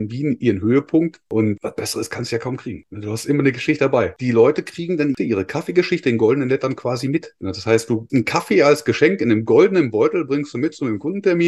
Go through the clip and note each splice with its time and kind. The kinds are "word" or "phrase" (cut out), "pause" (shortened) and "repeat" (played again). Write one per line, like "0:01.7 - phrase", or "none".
0:08.1 - word